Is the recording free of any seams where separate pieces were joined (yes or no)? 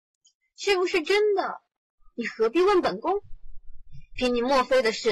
yes